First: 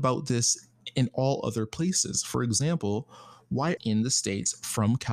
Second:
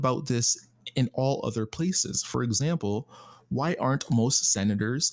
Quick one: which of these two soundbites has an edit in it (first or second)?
first